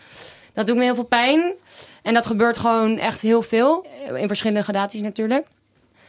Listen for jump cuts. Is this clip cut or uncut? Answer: uncut